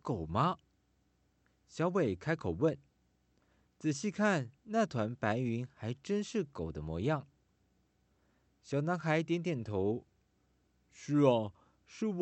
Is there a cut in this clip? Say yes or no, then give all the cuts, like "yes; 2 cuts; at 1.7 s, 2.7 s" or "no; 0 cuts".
yes; 1 cut; at 4.6 s